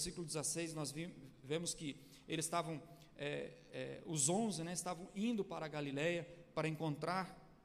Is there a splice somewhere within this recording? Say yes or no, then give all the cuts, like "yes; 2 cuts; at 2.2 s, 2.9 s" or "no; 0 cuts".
no; 0 cuts